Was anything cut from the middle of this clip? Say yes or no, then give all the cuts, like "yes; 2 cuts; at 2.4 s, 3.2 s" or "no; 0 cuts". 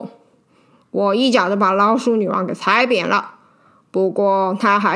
no; 0 cuts